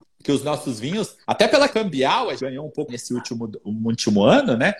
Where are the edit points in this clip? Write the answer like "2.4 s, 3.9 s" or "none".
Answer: 1.2 s, 1.7 s, 2.4 s, 2.9 s